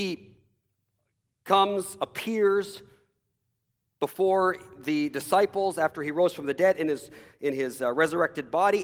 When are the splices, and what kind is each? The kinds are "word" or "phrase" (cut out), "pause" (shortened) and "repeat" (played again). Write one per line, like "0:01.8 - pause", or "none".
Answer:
none